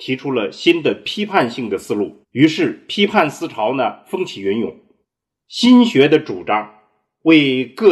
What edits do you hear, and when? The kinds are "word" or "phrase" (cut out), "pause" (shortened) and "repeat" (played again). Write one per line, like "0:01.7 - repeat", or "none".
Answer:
0:02.2 - pause
0:05.0 - pause